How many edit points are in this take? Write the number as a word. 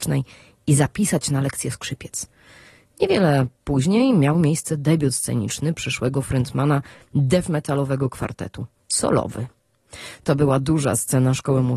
zero